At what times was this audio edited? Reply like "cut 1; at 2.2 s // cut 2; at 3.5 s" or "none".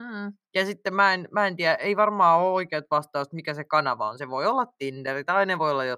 none

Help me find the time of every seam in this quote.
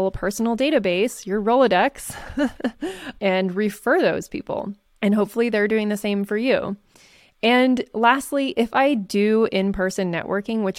none

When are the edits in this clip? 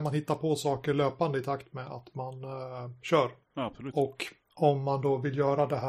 cut 1; at 3.4 s

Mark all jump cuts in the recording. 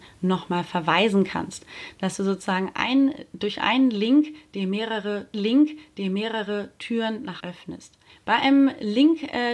cut 1; at 5.3 s // cut 2; at 7.4 s // cut 3; at 8.1 s

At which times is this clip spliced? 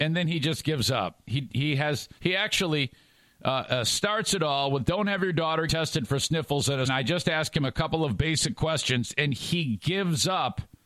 cut 1; at 2.2 s // cut 2; at 5.7 s // cut 3; at 6.8 s

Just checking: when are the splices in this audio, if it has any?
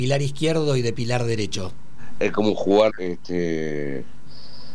cut 1; at 2.9 s

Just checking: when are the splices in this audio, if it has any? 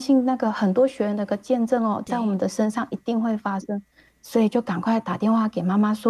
none

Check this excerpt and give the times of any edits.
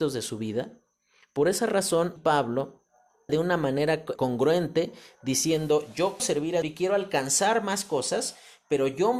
cut 1; at 2.2 s // cut 2; at 3.3 s // cut 3; at 4.2 s // cut 4; at 6.2 s // cut 5; at 6.6 s

